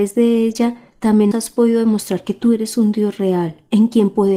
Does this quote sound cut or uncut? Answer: cut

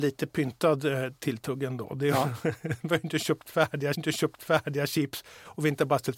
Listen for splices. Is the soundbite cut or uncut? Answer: cut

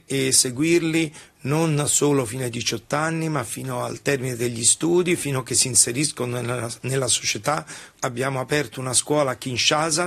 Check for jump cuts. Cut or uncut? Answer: uncut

